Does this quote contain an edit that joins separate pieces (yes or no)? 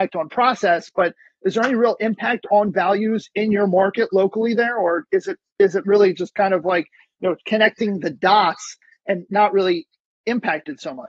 no